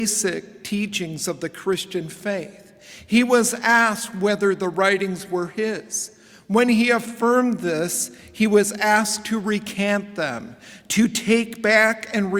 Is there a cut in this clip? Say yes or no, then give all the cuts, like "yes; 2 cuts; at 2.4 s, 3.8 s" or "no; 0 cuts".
no; 0 cuts